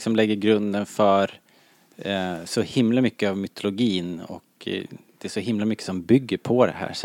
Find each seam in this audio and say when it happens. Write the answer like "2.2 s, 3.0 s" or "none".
none